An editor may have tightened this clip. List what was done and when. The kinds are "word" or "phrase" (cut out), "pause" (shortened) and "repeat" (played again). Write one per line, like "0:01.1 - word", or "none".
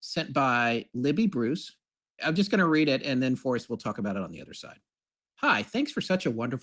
none